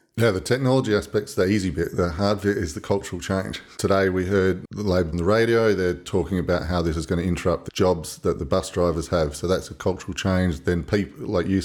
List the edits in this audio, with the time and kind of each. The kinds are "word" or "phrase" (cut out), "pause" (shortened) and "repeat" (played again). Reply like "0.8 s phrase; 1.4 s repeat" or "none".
5.1 s phrase; 7.7 s phrase